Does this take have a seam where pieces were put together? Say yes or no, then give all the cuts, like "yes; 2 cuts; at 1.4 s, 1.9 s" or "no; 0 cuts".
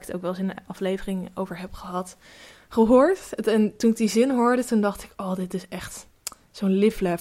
no; 0 cuts